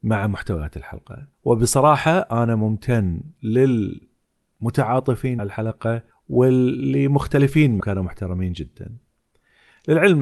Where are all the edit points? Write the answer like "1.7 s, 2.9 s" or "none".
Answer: 1.3 s, 5.4 s, 6.1 s, 7.8 s